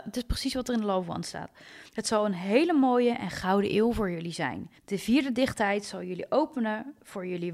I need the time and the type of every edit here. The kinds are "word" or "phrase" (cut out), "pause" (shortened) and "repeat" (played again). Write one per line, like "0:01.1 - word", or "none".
0:01.9 - pause
0:04.8 - pause

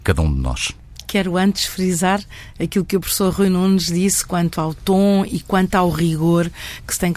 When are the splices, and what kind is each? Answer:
none

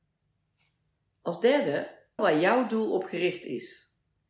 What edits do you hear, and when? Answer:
0:02.2 - word

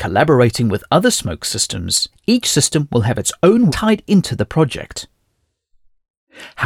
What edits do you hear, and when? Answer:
0:02.1 - pause
0:03.7 - word

